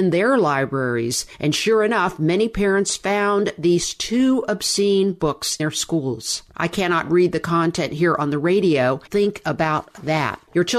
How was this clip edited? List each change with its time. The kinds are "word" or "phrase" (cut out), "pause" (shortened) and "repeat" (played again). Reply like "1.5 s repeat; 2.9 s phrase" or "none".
5.6 s word; 9.1 s word